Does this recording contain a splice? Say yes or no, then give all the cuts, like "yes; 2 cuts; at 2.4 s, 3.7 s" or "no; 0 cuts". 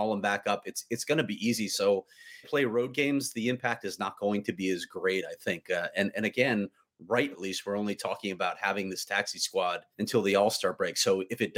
yes; 3 cuts; at 2.4 s, 7.3 s, 9.9 s